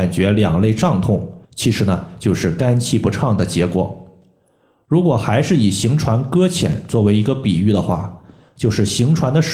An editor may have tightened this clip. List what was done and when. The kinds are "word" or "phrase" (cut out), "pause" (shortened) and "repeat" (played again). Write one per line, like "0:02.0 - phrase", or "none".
0:01.4 - pause